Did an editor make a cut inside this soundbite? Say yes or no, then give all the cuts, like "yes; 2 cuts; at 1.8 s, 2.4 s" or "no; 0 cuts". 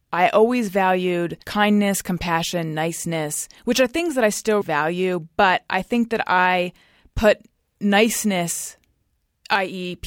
yes; 2 cuts; at 1.4 s, 4.6 s